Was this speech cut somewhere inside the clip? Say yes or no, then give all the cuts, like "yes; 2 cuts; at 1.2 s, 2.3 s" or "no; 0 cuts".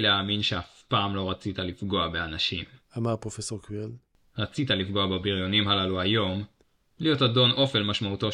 no; 0 cuts